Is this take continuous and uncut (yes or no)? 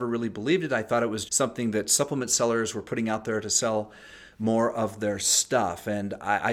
no